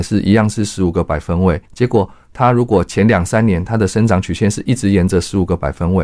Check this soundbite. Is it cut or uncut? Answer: cut